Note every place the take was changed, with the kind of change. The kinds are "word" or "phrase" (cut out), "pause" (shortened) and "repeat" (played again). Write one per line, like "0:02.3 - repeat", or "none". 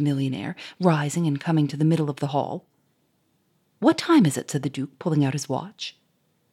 none